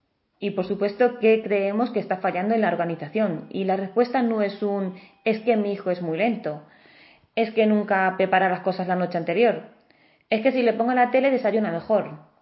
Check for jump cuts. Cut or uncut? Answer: uncut